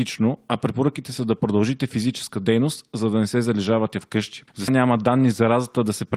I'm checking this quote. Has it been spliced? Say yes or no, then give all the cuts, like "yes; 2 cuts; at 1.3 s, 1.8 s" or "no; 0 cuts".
yes; 1 cut; at 4.7 s